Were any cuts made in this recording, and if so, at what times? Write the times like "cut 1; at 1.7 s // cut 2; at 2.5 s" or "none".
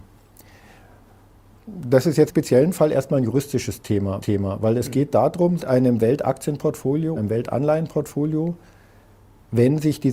cut 1; at 2.3 s // cut 2; at 4.2 s // cut 3; at 5.6 s // cut 4; at 7.2 s